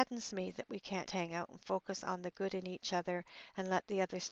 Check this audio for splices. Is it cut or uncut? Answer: cut